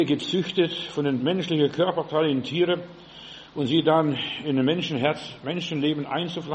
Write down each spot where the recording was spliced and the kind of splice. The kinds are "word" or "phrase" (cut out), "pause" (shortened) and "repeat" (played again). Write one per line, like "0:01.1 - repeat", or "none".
0:01.2 - word